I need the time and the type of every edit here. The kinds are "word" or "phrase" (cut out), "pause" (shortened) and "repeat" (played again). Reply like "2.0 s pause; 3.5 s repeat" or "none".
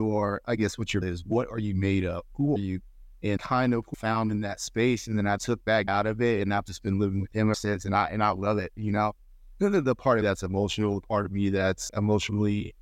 1.0 s word; 2.6 s word; 3.4 s word; 3.9 s word; 5.4 s word; 5.9 s word; 7.5 s word; 10.2 s word; 11.9 s word